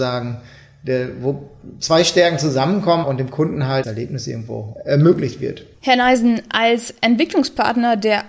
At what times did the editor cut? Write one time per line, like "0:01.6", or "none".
0:03.0
0:03.8
0:05.7

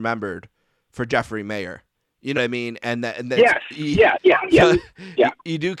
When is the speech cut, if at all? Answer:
0:01.9
0:02.4

